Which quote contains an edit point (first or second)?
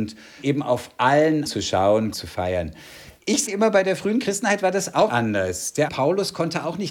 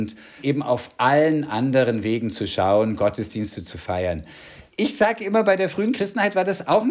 first